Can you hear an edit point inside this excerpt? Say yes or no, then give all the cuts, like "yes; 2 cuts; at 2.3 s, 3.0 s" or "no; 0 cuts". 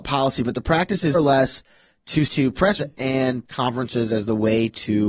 yes; 4 cuts; at 1.1 s, 2.3 s, 2.8 s, 3.4 s